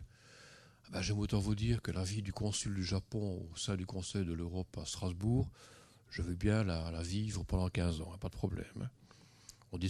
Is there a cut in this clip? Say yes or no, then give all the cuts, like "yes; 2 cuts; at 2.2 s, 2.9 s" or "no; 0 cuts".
no; 0 cuts